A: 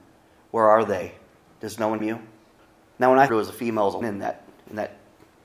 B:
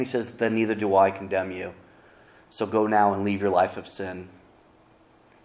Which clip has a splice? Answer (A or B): A